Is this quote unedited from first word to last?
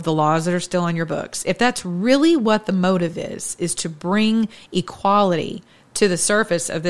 yes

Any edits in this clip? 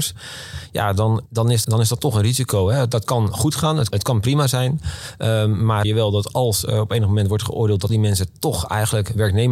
yes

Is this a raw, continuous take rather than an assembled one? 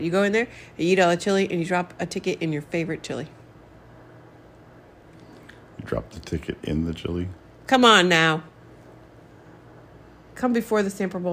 yes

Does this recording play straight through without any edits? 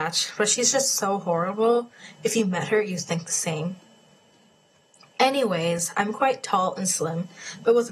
yes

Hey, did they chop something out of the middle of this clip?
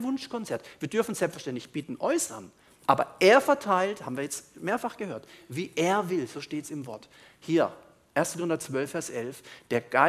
no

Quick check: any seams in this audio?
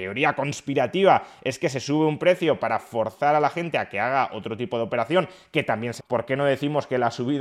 yes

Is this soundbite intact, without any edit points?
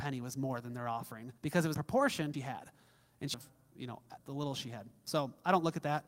no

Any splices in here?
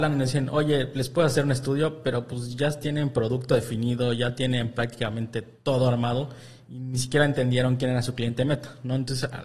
no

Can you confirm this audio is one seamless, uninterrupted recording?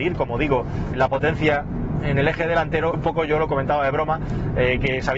no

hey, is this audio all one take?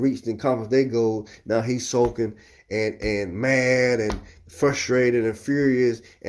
yes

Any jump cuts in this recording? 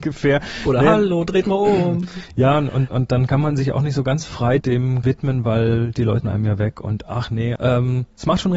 yes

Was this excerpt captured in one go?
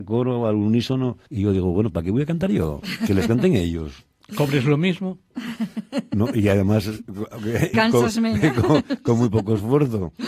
no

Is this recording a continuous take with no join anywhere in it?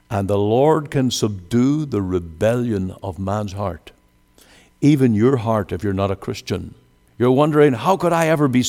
yes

